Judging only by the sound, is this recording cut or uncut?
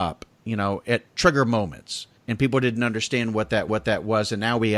cut